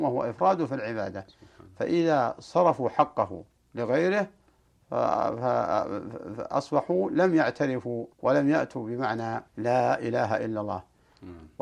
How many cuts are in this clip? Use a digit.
3